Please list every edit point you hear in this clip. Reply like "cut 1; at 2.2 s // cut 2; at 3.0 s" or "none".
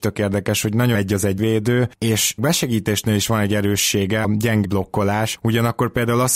cut 1; at 0.9 s // cut 2; at 1.4 s // cut 3; at 2.4 s // cut 4; at 4.2 s // cut 5; at 4.6 s